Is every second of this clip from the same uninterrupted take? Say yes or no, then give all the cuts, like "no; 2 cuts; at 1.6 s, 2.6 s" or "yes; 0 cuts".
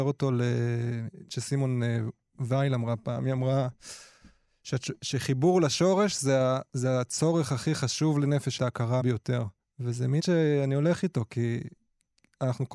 no; 5 cuts; at 1.3 s, 8.6 s, 9.0 s, 9.6 s, 10.2 s